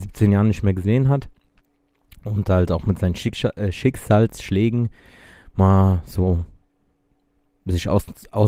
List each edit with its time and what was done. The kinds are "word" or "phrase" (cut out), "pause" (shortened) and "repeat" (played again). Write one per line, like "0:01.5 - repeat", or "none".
none